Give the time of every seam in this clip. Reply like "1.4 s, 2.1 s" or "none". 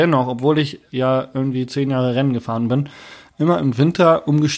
none